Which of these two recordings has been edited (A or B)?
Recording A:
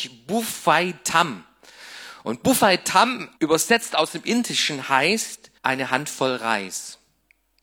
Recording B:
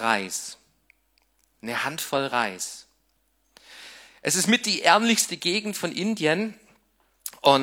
A